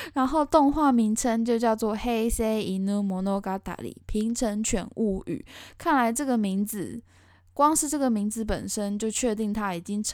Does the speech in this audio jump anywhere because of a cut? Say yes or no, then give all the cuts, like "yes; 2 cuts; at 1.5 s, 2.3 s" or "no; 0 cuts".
no; 0 cuts